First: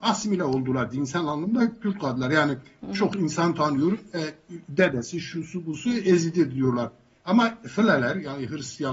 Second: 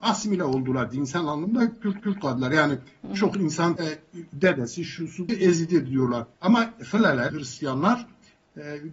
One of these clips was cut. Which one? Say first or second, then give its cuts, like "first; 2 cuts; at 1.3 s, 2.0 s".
second; 5 cuts; at 2.0 s, 3.8 s, 5.3 s, 6.3 s, 7.3 s